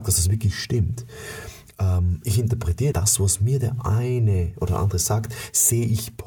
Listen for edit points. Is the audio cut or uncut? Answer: cut